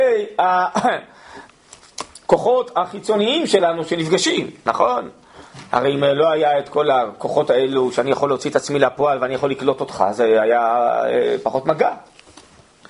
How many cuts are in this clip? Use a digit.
0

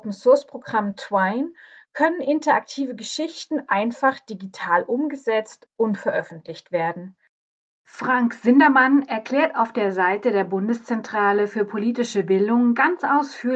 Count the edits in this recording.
0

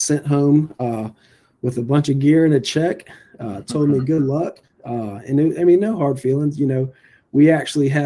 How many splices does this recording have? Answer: 0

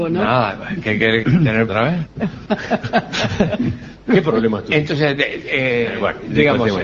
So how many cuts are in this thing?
2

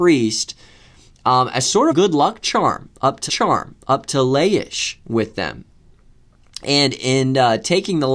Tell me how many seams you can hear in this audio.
2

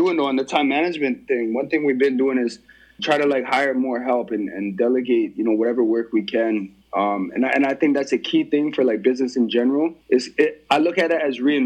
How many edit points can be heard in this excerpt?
3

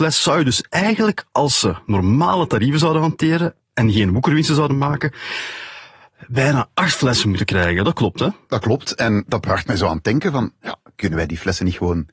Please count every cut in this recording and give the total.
0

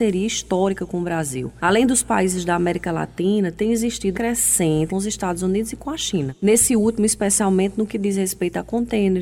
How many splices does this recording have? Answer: 2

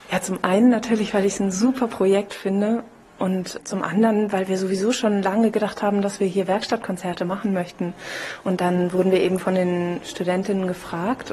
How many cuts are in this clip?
1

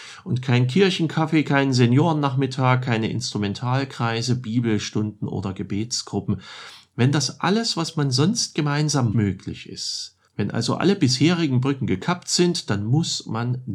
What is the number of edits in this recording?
2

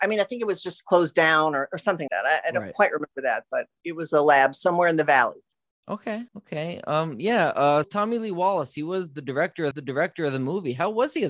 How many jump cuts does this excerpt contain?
4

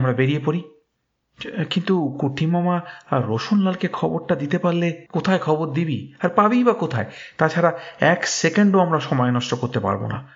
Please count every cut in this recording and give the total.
1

